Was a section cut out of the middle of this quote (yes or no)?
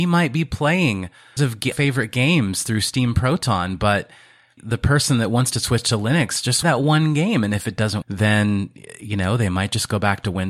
yes